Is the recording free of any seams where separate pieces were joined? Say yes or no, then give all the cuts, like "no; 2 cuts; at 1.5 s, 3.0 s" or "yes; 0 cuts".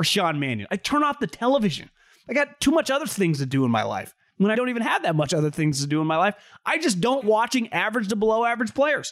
no; 2 cuts; at 4.5 s, 7.2 s